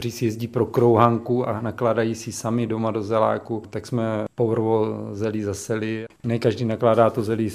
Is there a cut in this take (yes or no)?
no